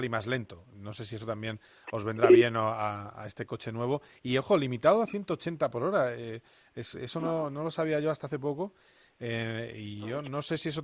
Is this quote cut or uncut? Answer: uncut